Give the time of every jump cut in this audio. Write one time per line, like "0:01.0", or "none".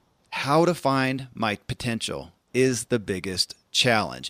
none